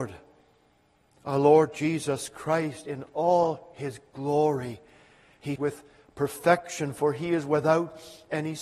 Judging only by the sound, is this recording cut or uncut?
cut